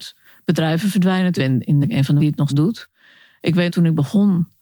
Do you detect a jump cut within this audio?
yes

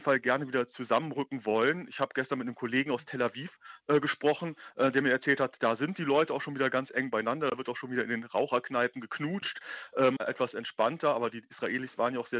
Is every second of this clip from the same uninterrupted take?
no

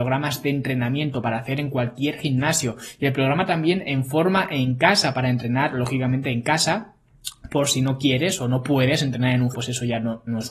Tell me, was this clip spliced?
yes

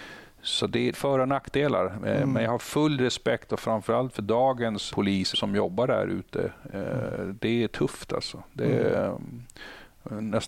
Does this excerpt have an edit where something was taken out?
yes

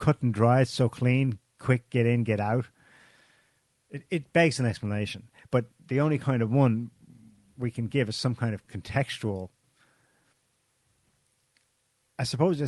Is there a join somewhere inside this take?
no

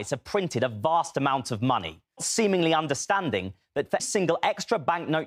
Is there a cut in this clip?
yes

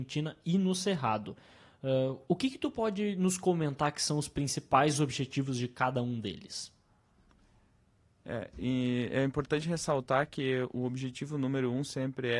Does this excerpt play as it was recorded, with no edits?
yes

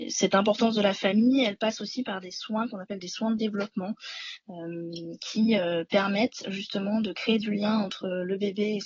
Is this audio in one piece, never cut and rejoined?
yes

